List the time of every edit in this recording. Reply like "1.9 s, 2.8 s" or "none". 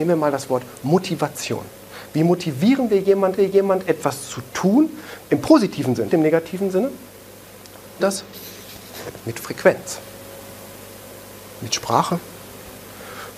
3.4 s, 5.2 s, 6.1 s, 8.0 s